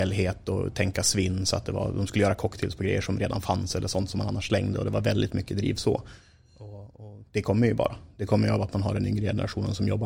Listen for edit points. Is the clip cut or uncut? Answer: cut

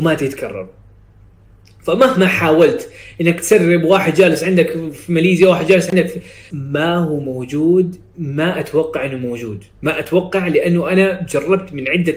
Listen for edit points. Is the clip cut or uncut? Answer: cut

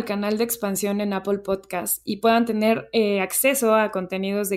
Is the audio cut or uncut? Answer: uncut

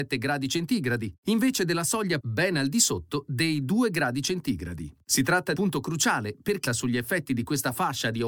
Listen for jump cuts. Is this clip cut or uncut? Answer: cut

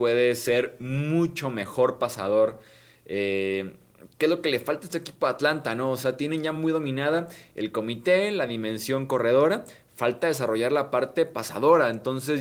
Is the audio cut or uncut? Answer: uncut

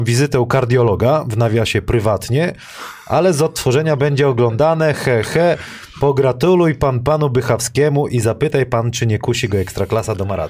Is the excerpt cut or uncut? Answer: cut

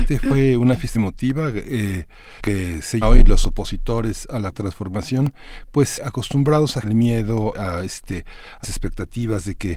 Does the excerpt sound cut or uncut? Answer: cut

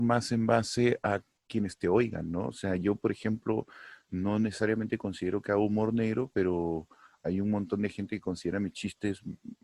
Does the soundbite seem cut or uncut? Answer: uncut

